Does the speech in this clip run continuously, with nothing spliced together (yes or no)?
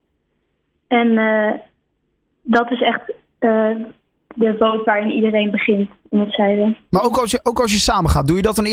yes